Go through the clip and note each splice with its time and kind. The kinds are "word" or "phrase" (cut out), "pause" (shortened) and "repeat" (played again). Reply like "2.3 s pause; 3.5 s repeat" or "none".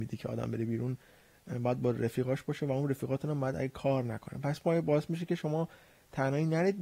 none